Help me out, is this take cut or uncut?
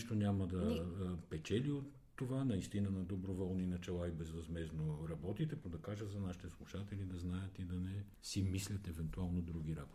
cut